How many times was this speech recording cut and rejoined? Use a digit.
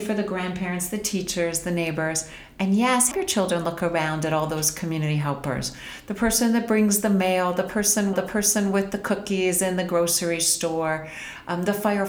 2